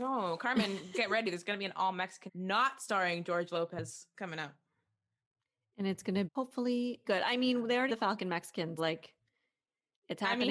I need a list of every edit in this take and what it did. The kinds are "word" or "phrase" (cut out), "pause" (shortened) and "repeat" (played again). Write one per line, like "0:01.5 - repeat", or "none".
0:02.3 - word
0:06.3 - word
0:07.1 - word
0:07.9 - word
0:08.8 - word